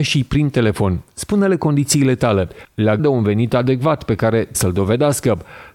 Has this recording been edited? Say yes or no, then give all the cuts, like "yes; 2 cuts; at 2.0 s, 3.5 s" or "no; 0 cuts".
yes; 2 cuts; at 3.0 s, 4.5 s